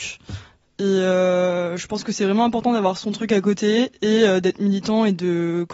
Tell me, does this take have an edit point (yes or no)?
no